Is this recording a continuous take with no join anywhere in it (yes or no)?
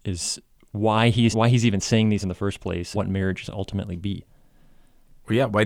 no